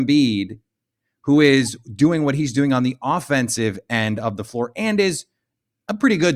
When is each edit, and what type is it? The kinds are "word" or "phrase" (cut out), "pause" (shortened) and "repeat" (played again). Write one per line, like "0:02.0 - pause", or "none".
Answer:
none